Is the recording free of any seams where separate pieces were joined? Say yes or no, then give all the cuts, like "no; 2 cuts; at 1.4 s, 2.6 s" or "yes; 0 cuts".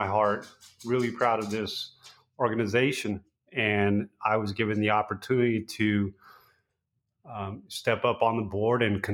yes; 0 cuts